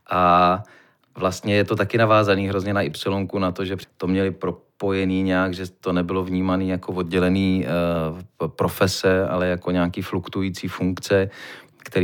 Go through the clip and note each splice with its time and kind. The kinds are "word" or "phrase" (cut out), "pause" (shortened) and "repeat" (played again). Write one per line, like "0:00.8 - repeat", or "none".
0:03.8 - phrase